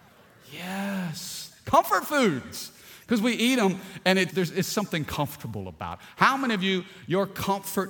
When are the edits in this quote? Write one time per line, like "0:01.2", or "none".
0:04.3